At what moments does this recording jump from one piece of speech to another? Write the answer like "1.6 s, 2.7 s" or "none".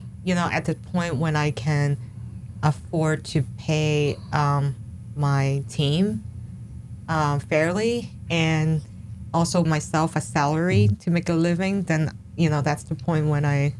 9.6 s